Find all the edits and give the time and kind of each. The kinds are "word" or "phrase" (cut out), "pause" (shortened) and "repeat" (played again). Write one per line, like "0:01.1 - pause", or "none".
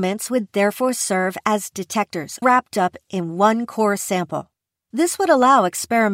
0:01.7 - word
0:02.4 - word